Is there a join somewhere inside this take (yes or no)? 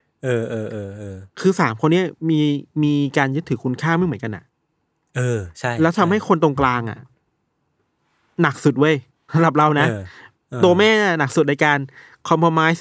no